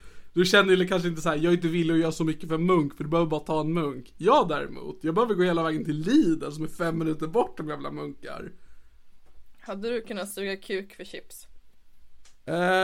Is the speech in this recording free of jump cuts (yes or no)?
yes